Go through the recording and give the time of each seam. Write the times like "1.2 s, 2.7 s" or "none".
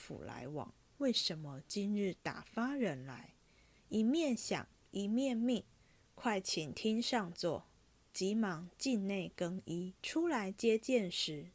10.0 s